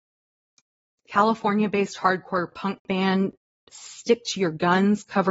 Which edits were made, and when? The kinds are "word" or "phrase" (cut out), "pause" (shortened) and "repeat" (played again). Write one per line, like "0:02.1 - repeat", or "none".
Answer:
none